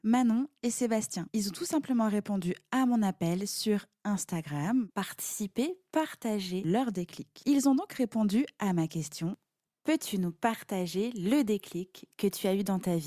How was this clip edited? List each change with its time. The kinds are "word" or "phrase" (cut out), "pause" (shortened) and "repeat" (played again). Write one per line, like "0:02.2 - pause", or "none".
0:04.9 - word